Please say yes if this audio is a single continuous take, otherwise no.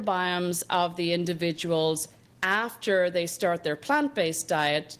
yes